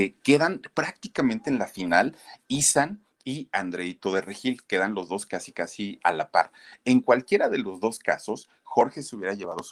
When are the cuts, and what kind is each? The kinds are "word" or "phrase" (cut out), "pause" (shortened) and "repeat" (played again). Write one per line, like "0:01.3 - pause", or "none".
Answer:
none